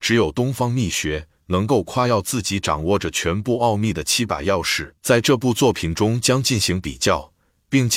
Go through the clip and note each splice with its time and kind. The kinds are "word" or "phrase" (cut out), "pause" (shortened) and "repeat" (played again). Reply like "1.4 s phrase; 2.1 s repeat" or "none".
5.0 s pause